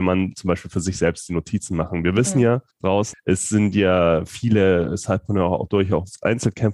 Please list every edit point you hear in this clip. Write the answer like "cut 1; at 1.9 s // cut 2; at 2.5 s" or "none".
cut 1; at 2.7 s

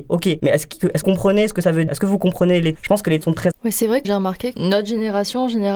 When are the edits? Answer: cut 1; at 1.0 s // cut 2; at 1.9 s // cut 3; at 2.8 s // cut 4; at 3.2 s // cut 5; at 3.5 s // cut 6; at 4.0 s // cut 7; at 4.5 s

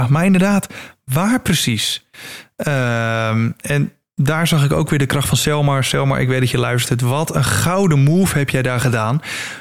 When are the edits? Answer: none

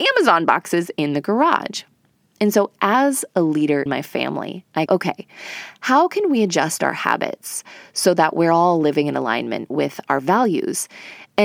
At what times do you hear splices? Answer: cut 1; at 3.9 s // cut 2; at 4.9 s

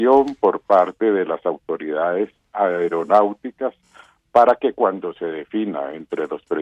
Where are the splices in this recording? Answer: none

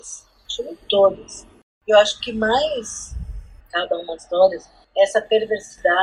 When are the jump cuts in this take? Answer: cut 1; at 2.2 s // cut 2; at 3.6 s // cut 3; at 4.2 s

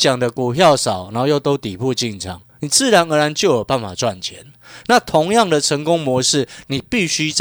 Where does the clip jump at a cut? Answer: cut 1; at 2.5 s

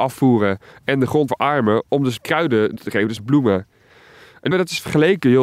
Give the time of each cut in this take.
cut 1; at 1.3 s // cut 2; at 2.2 s // cut 3; at 2.8 s // cut 4; at 3.2 s // cut 5; at 4.5 s

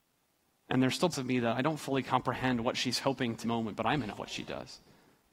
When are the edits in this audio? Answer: cut 1; at 1.1 s // cut 2; at 3.4 s // cut 3; at 4.1 s

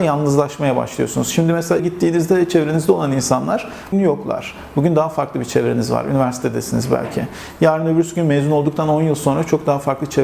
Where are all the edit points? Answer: cut 1; at 1.8 s // cut 2; at 3.9 s

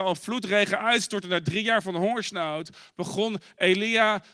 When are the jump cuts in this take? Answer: none

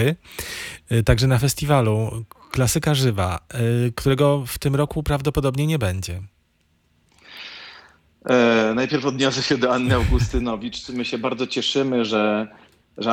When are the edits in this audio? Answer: none

